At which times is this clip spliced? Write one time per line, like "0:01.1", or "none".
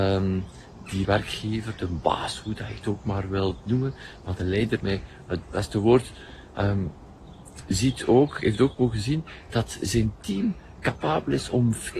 0:01.0
0:04.8
0:05.4